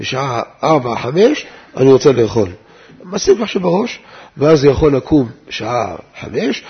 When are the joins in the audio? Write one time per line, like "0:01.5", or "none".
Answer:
none

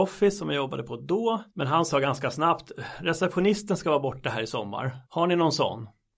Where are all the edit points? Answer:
0:01.5
0:05.0

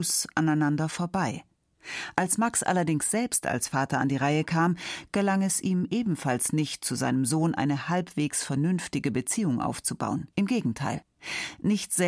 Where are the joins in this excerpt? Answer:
0:10.3

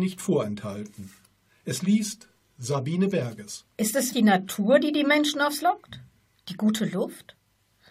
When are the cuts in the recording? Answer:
0:03.7
0:04.1
0:05.6

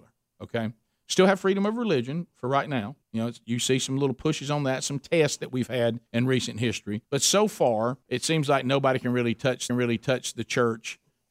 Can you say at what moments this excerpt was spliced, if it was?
0:03.0
0:06.1
0:07.0
0:08.0
0:09.7

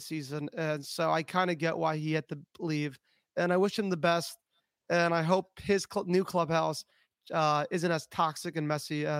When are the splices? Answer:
none

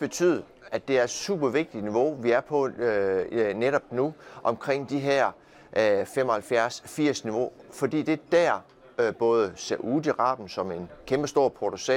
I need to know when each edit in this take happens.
none

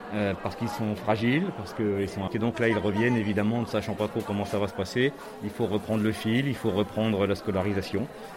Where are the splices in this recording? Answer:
0:02.3

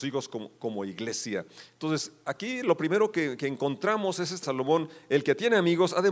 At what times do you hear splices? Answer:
0:04.4

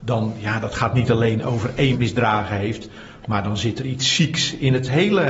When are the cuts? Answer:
0:01.9

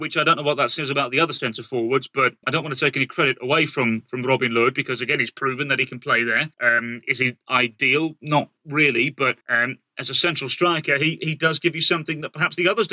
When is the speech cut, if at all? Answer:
0:02.4
0:06.5
0:09.4

